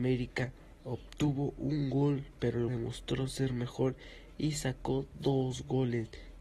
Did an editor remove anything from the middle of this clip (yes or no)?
yes